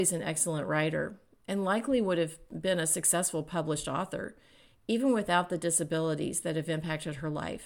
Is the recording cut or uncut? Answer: uncut